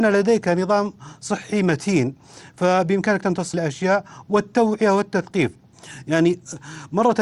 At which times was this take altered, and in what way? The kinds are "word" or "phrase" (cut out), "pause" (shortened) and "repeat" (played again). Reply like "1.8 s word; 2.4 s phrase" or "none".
3.5 s word